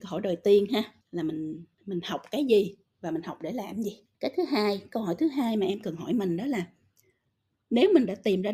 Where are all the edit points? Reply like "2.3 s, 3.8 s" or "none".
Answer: 1.0 s, 1.7 s, 4.1 s